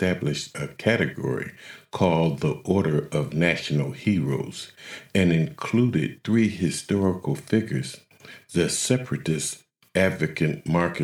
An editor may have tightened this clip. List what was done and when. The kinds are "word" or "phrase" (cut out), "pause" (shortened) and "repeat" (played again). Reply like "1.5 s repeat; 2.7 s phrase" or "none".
none